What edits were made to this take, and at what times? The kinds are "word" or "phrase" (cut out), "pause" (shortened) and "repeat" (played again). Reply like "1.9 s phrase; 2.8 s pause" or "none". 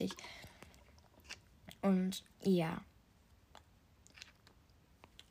2.3 s pause